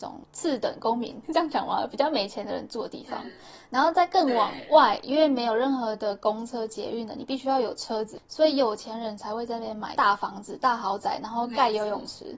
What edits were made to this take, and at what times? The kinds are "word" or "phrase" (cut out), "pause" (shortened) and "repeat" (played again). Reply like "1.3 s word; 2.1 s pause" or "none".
1.2 s pause